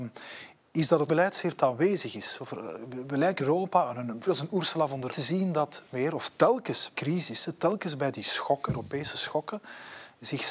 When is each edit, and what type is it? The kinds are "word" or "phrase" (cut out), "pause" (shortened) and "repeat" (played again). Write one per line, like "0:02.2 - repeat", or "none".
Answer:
0:01.1 - word
0:01.6 - word
0:03.4 - word
0:04.3 - word
0:05.1 - word
0:05.9 - word
0:06.9 - word
0:08.7 - word